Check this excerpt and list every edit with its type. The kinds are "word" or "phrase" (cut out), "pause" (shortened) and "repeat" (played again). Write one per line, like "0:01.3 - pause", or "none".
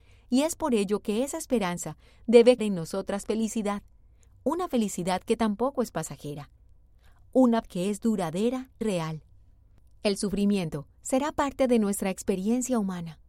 0:02.6 - word
0:07.6 - word
0:08.8 - word